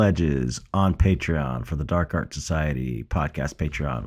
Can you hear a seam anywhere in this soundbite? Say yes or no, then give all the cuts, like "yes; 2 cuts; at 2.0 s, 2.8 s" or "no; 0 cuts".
no; 0 cuts